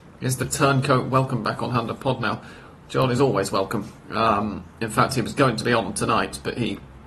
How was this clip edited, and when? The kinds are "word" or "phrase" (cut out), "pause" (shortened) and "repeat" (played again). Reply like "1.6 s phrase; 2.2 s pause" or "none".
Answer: none